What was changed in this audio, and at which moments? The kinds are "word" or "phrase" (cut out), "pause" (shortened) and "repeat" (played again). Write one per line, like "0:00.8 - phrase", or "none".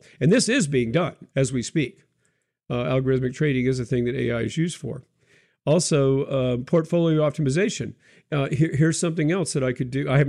0:01.3 - pause